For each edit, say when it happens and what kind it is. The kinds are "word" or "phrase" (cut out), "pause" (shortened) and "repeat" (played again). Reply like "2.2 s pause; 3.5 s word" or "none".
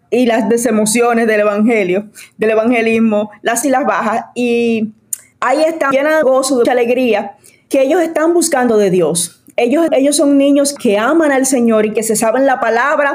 3.6 s word; 5.9 s word; 6.2 s word; 6.6 s word; 9.9 s word; 10.8 s word